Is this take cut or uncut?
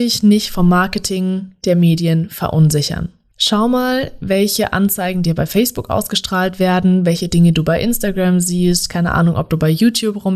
uncut